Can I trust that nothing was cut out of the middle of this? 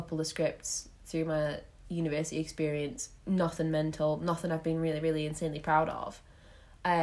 yes; 0 cuts

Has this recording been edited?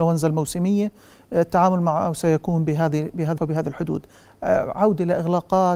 yes; 1 cut; at 3.4 s

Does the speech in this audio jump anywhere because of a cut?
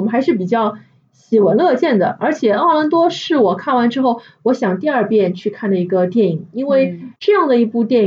yes; 1 cut; at 7.2 s

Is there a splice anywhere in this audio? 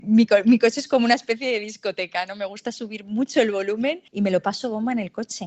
yes; 1 cut; at 4.1 s

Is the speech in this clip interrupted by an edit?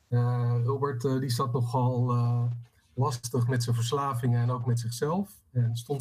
no; 0 cuts

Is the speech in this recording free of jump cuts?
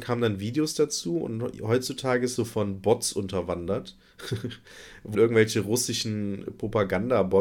no; 2 cuts; at 2.4 s, 5.1 s

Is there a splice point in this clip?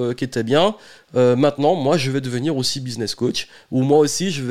no; 0 cuts

